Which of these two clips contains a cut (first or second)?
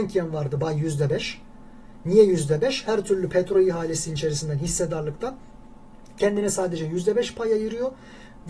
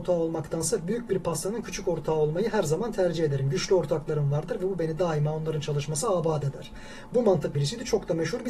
second